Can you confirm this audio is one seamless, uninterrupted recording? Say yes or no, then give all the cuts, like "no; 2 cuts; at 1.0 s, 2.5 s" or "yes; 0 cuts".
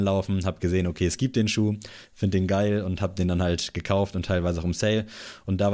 yes; 0 cuts